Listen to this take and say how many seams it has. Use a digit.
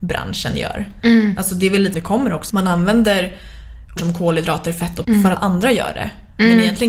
5